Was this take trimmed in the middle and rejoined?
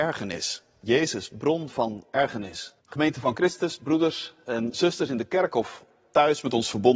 yes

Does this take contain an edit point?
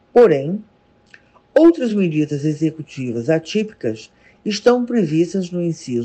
no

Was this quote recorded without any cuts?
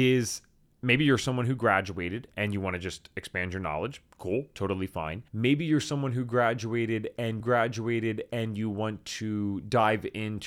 no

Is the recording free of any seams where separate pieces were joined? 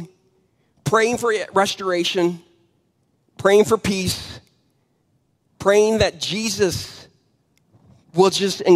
yes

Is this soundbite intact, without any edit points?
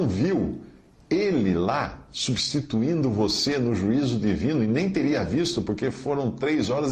yes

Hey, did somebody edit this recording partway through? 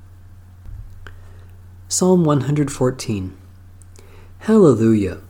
no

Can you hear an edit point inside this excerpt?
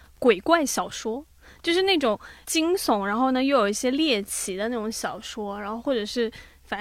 no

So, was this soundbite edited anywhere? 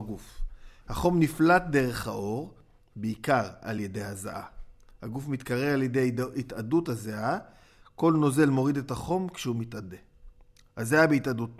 no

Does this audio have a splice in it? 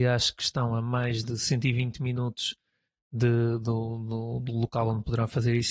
no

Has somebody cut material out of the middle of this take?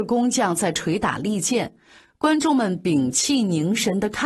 no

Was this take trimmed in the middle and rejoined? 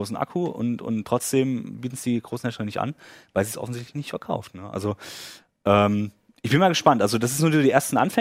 no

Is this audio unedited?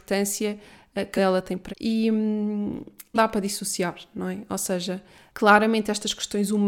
no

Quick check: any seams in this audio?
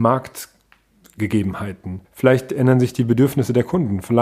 yes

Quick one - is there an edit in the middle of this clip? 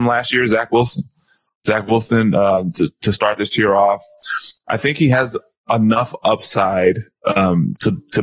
no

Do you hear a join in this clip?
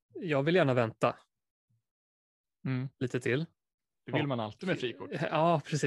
no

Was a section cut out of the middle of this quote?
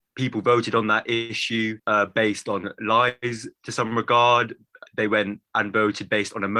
yes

